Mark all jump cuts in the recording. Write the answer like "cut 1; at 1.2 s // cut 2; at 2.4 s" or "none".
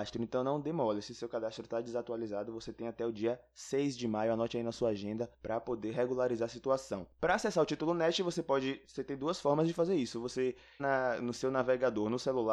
cut 1; at 10.8 s